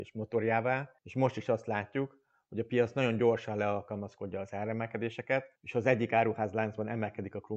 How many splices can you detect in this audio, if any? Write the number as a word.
two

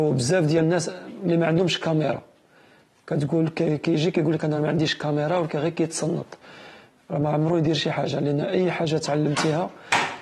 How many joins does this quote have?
zero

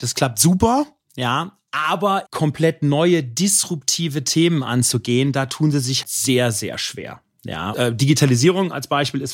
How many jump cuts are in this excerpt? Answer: three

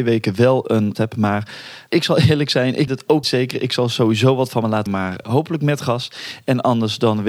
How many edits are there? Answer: six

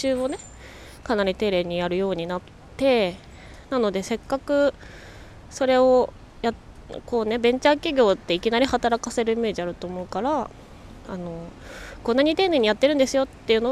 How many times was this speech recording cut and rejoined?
zero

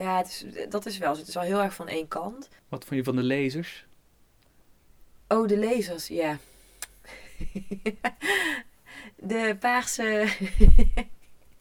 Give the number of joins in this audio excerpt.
two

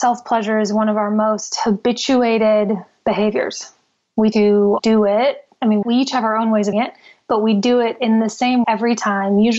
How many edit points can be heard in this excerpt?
five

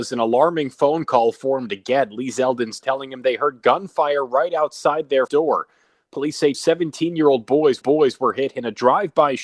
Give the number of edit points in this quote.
four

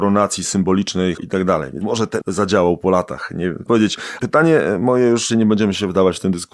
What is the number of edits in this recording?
six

